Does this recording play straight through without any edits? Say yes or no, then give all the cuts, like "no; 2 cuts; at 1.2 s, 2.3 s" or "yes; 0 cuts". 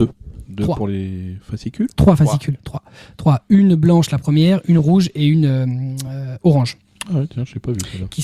yes; 0 cuts